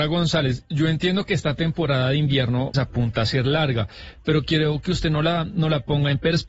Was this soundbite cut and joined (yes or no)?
yes